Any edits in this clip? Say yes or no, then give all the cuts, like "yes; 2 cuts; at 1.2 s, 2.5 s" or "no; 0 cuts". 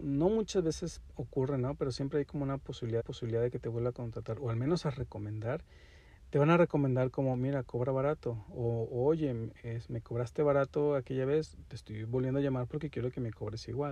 yes; 1 cut; at 3.0 s